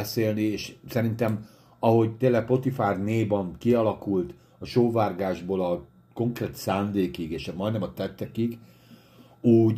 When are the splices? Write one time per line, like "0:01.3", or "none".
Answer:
none